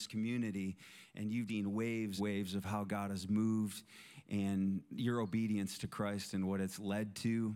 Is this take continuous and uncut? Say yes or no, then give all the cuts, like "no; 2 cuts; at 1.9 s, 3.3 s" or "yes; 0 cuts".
no; 2 cuts; at 1.5 s, 2.2 s